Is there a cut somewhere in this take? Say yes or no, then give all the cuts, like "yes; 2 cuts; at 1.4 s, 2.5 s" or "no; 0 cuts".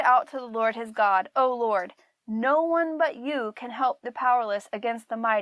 no; 0 cuts